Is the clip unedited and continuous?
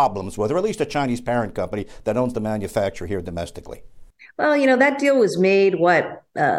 yes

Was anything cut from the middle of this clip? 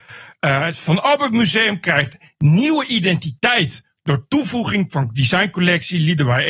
no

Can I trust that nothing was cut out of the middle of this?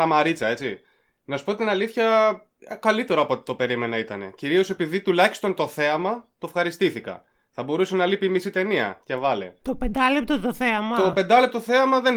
yes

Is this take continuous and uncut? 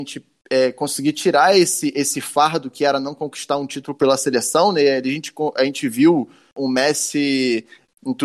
yes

